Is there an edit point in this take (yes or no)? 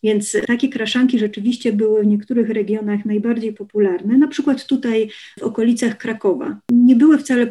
no